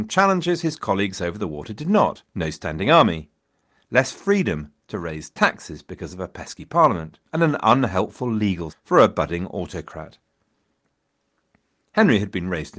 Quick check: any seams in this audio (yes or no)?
yes